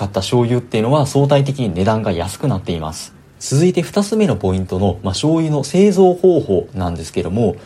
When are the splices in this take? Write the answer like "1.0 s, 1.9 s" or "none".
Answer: 3.2 s